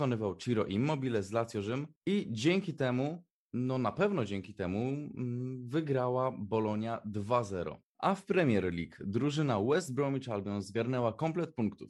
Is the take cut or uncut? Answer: uncut